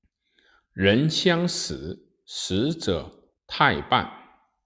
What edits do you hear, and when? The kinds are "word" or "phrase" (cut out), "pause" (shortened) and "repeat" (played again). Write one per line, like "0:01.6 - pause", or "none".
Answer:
0:03.4 - pause